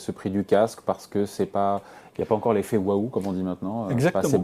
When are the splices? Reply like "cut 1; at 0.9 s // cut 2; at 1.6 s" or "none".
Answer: none